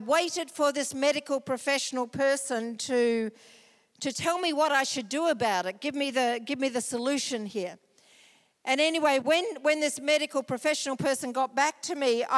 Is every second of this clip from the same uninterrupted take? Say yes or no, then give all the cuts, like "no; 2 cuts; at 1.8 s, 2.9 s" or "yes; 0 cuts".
yes; 0 cuts